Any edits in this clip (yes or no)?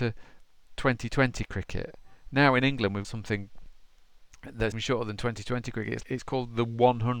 yes